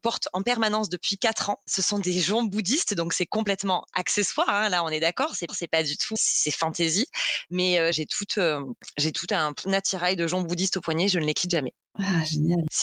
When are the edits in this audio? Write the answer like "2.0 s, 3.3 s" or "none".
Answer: 5.5 s, 6.2 s, 7.9 s